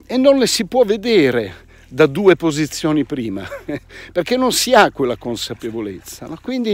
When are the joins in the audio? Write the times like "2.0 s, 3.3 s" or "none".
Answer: none